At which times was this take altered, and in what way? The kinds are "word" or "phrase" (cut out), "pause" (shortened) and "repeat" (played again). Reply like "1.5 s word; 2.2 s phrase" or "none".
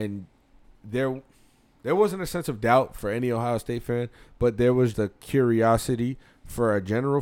4.9 s word